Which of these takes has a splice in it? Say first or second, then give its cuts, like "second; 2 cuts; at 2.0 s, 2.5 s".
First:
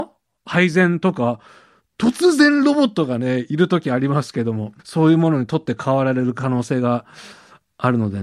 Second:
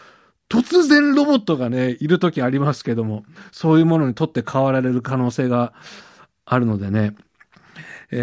first; 1 cut; at 4.8 s